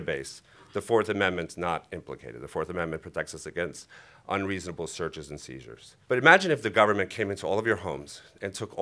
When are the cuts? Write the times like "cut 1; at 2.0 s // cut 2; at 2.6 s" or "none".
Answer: cut 1; at 6.0 s